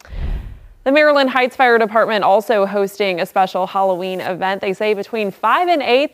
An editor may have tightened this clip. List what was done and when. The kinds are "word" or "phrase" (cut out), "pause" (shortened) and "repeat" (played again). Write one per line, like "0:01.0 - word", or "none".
none